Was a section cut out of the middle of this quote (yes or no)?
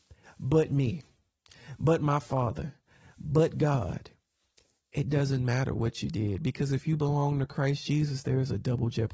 no